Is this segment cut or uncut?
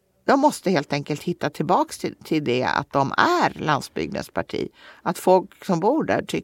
uncut